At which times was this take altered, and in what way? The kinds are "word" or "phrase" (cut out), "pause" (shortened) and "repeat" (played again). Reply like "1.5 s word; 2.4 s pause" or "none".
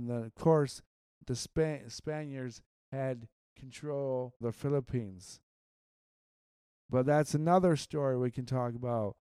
4.4 s word